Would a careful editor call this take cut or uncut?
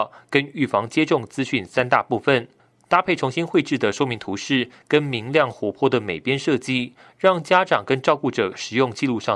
uncut